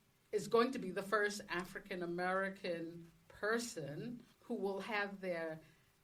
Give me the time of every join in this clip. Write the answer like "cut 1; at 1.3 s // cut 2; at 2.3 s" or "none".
cut 1; at 4.3 s